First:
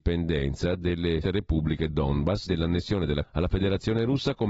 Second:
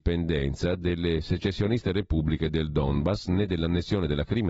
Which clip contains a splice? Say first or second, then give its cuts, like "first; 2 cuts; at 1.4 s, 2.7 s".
first; 4 cuts; at 1.2 s, 1.9 s, 2.5 s, 3.2 s